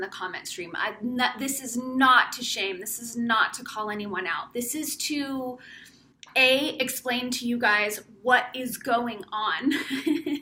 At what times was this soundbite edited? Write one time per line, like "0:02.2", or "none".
0:06.1